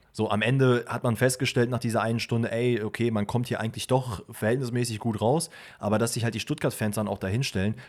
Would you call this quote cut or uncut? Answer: uncut